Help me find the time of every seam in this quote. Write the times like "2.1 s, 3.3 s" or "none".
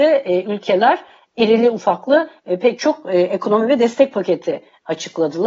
1.3 s